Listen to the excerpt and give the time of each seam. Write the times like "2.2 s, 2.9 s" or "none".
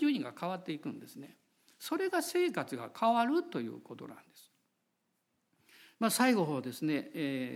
none